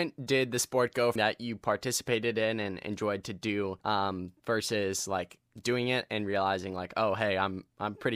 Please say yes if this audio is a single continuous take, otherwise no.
no